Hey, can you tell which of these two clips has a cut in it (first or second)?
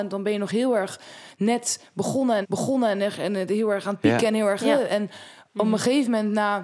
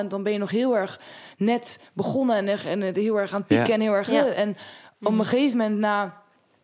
first